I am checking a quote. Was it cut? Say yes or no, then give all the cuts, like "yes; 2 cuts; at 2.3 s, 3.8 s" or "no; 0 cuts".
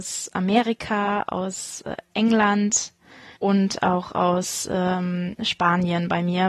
yes; 1 cut; at 3.4 s